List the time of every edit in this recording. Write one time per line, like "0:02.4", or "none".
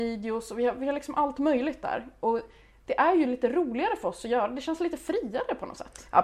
none